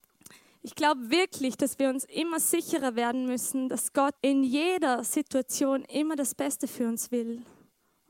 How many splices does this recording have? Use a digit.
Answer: 1